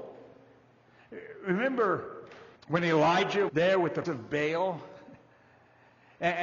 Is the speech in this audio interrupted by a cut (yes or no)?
yes